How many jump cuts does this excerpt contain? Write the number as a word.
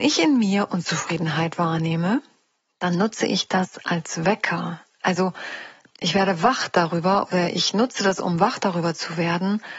zero